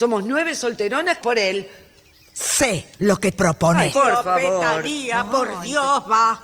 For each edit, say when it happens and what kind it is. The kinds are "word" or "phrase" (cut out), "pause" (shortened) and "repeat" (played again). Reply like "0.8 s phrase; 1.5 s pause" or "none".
1.2 s word; 2.9 s pause; 3.3 s word; 3.9 s phrase